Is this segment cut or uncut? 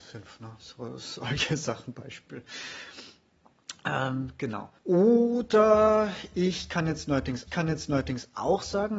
cut